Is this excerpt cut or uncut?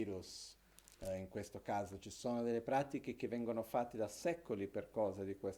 uncut